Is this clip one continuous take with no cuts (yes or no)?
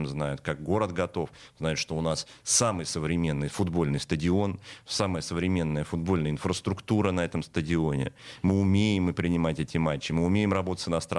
yes